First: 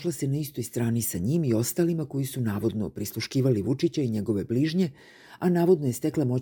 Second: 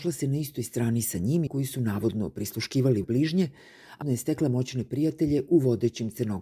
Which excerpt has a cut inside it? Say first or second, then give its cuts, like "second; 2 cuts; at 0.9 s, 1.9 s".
second; 3 cuts; at 1.5 s, 3.0 s, 4.0 s